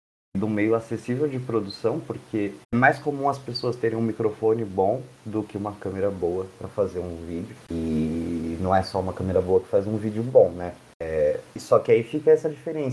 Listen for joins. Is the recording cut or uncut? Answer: cut